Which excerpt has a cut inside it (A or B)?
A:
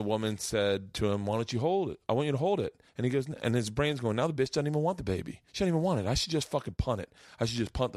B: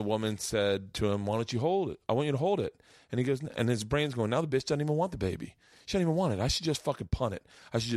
A